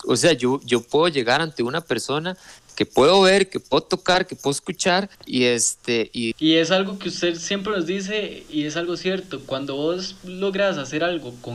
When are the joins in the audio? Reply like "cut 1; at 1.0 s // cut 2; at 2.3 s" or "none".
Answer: cut 1; at 5.1 s